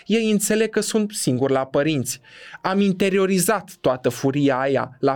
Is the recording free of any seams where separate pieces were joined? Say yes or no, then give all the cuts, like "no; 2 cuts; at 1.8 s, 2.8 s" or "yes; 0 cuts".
yes; 0 cuts